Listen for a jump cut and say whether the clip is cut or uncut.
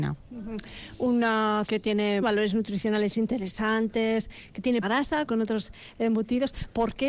cut